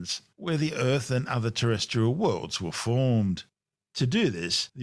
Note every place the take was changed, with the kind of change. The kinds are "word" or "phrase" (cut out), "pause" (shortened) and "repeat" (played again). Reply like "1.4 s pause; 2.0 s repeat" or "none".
none